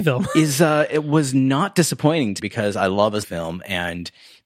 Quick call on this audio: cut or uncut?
cut